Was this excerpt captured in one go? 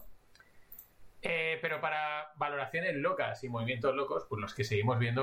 yes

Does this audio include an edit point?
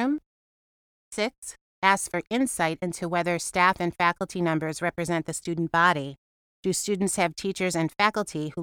no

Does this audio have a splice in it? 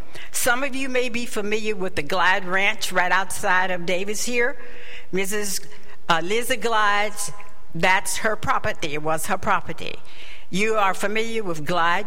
no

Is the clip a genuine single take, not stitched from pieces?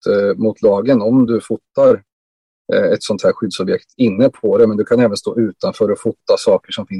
yes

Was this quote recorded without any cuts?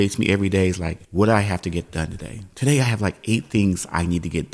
no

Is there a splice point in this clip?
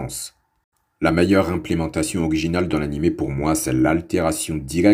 no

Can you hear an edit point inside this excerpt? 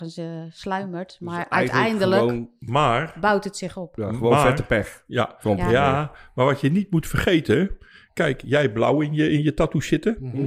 no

